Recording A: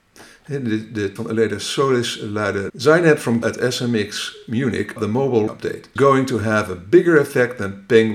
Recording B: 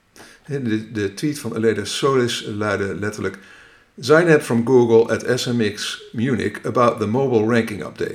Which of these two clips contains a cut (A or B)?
A